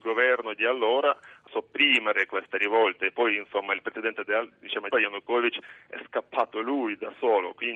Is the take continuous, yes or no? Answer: no